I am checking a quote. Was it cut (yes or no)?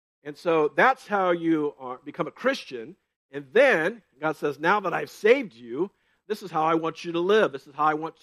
no